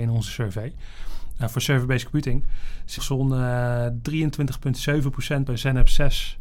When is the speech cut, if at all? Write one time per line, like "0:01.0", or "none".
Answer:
0:03.0
0:05.5